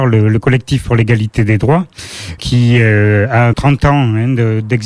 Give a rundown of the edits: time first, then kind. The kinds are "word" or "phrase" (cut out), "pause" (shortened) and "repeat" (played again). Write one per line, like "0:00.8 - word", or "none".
0:02.4 - word
0:03.5 - word